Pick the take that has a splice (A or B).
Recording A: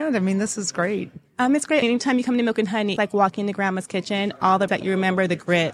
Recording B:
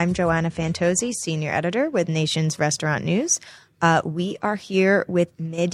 A